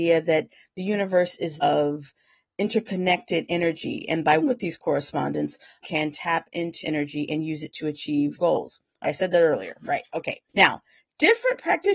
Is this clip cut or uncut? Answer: cut